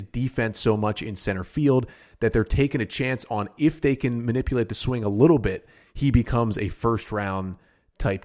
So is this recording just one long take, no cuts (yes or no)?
yes